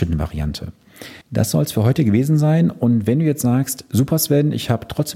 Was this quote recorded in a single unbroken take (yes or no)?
no